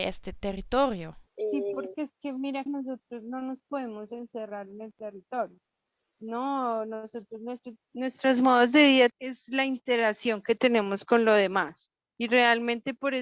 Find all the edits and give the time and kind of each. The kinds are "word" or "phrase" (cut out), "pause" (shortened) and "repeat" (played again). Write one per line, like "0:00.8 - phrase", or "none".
0:01.3 - pause
0:02.7 - word
0:09.1 - word